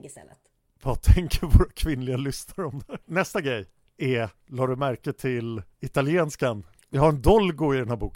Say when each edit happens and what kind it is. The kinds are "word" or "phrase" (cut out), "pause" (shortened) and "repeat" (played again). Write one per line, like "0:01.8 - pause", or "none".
0:03.0 - pause
0:04.4 - pause
0:05.7 - pause